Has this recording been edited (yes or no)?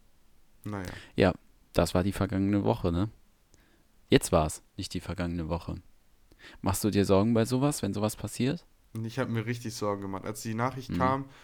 no